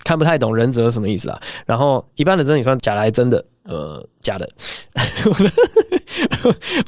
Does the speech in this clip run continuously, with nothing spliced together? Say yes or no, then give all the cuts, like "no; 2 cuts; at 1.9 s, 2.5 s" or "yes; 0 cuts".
yes; 0 cuts